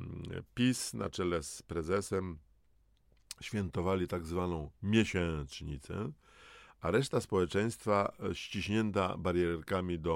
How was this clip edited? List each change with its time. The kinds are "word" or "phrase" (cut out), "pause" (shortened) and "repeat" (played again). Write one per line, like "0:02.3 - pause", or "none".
none